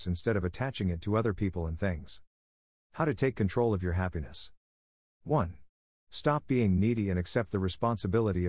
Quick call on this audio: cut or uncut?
uncut